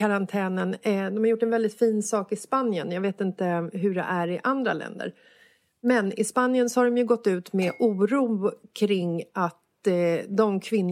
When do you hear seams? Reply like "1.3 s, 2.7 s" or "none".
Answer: none